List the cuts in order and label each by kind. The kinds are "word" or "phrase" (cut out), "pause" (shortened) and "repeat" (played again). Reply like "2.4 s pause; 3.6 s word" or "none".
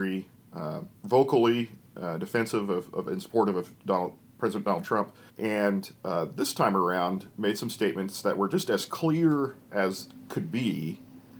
1.0 s pause; 5.3 s pause